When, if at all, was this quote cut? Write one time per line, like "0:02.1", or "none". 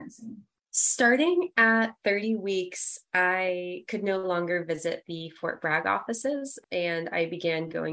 none